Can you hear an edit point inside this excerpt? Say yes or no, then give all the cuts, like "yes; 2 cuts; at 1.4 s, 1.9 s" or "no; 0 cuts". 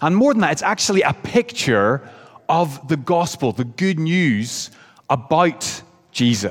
no; 0 cuts